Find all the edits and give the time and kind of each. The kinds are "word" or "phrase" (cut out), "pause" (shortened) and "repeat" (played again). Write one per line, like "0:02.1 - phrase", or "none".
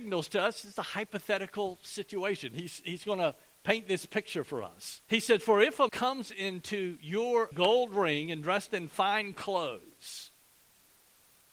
0:05.0 - pause
0:05.9 - word
0:07.5 - phrase